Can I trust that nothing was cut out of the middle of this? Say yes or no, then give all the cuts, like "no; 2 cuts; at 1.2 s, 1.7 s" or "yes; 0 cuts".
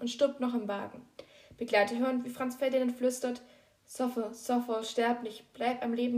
yes; 0 cuts